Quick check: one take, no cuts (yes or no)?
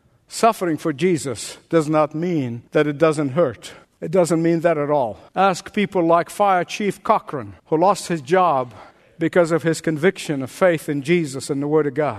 no